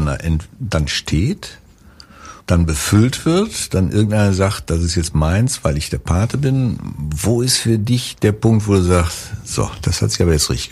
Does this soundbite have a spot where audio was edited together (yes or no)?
yes